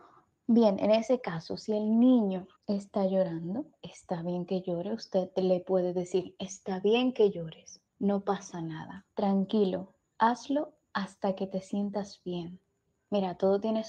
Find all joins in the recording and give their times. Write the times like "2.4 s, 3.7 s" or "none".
2.6 s, 7.9 s, 9.1 s